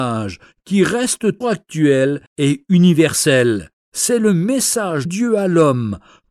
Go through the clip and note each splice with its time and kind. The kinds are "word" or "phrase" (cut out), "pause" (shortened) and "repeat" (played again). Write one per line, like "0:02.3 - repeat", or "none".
0:01.4 - word
0:02.3 - pause
0:03.8 - pause
0:05.1 - word

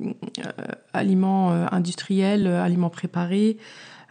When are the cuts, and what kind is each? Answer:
none

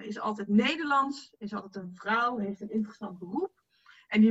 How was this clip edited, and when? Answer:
none

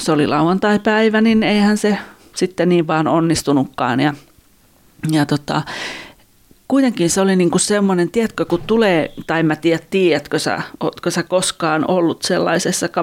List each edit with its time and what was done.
none

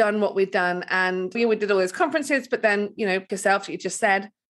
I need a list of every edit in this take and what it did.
0:01.3 - word
0:03.3 - word

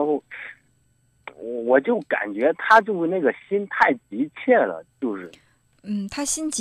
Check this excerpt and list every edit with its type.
none

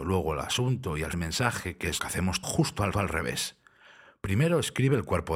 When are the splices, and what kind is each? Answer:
0:01.1 - word
0:02.0 - word
0:02.4 - phrase
0:02.9 - repeat

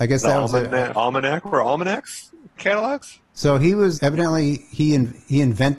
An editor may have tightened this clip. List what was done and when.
0:00.9 - phrase
0:02.6 - word
0:03.2 - pause
0:03.9 - word

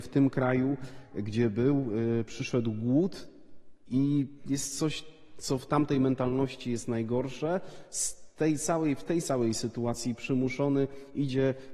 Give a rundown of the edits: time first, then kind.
none

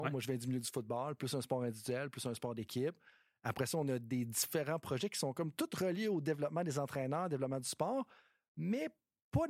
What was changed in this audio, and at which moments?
none

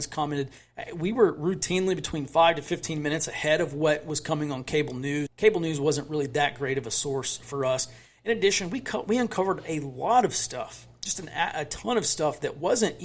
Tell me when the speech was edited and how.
0:05.3 - word

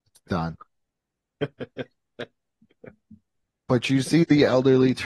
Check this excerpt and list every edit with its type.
none

